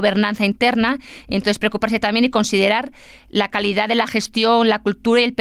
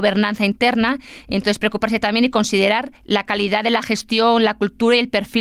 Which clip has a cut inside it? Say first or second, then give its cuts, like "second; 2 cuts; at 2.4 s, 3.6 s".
second; 1 cut; at 3.0 s